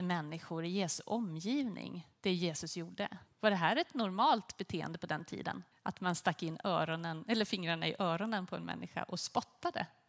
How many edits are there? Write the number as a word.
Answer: three